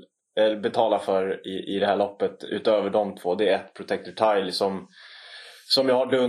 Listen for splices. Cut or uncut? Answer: uncut